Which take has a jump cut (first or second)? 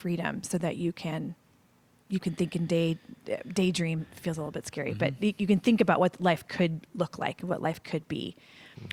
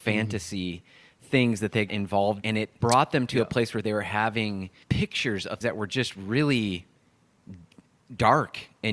second